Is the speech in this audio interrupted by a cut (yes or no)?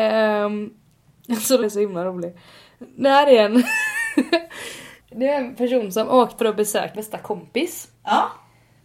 yes